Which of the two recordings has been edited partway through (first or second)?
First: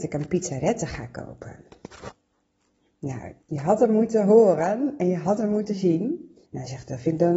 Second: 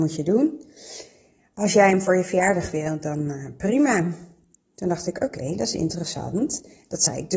first